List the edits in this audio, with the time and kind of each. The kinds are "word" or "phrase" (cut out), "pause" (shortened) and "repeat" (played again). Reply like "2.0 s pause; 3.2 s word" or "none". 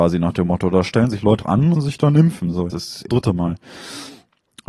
1.4 s word; 1.7 s phrase; 2.7 s word; 3.1 s phrase